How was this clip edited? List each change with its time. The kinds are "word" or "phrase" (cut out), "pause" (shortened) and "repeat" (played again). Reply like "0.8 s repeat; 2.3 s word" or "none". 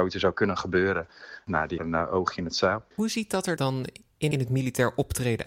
1.8 s phrase; 2.9 s pause; 3.6 s word; 4.3 s phrase